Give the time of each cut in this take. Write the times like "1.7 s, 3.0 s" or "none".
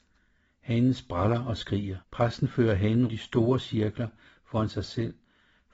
2.0 s, 3.1 s